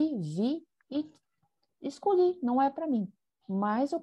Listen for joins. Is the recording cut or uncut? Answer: uncut